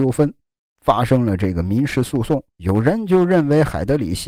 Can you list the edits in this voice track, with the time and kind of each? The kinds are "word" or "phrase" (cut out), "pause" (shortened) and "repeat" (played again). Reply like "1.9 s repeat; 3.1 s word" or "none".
2.5 s pause